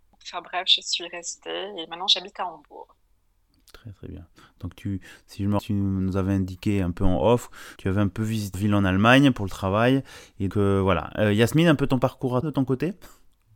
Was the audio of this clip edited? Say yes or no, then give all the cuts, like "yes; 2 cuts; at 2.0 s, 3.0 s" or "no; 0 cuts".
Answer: yes; 5 cuts; at 5.6 s, 7.8 s, 8.5 s, 10.5 s, 12.4 s